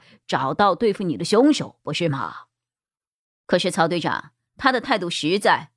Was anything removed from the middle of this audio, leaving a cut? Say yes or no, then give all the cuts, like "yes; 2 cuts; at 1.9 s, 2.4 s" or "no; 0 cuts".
no; 0 cuts